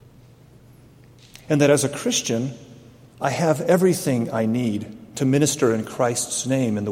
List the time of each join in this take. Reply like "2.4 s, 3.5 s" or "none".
none